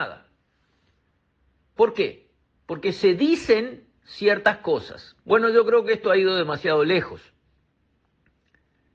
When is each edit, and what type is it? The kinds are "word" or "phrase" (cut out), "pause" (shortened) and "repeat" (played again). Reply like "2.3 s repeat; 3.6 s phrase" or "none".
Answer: 2.6 s pause; 5.2 s pause